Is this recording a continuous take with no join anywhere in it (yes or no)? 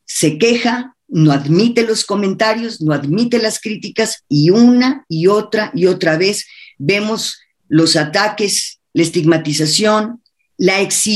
yes